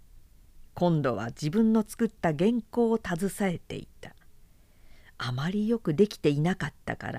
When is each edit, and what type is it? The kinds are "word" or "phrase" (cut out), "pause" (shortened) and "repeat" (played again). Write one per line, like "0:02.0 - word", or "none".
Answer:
none